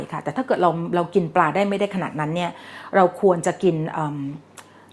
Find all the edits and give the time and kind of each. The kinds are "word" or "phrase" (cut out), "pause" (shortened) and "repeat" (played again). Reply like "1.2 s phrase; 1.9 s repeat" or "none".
none